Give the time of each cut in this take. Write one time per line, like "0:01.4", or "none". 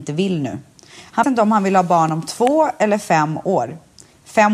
0:01.2